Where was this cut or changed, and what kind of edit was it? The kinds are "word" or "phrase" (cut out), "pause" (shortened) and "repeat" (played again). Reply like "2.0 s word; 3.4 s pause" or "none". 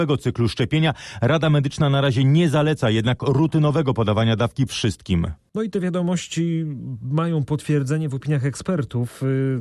4.7 s word